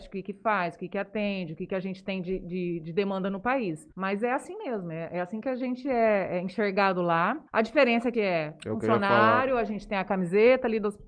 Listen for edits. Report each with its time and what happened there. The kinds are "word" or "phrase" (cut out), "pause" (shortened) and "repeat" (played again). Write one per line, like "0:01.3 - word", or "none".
0:03.9 - pause
0:07.5 - pause
0:08.1 - phrase